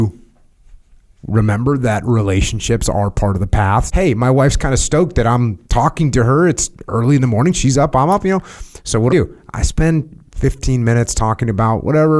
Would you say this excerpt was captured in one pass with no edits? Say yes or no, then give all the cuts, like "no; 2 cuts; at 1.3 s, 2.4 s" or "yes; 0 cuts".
no; 3 cuts; at 3.9 s, 5.6 s, 9.1 s